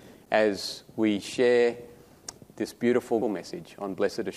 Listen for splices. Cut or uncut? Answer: cut